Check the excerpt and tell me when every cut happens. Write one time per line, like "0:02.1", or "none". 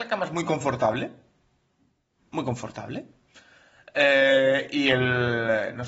none

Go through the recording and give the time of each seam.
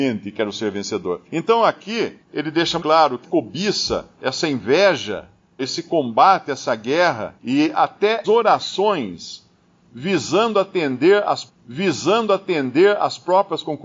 0:01.2
0:02.2
0:02.8
0:03.2
0:04.1
0:05.6
0:07.4
0:08.2
0:11.5

